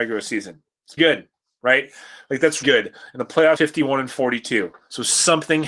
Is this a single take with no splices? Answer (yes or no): no